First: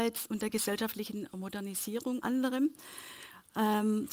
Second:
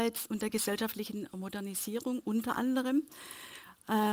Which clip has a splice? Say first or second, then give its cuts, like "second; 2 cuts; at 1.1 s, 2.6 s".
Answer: first; 1 cut; at 2.2 s